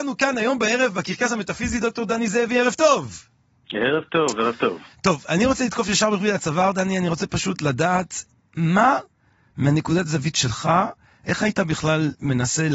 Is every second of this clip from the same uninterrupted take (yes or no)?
yes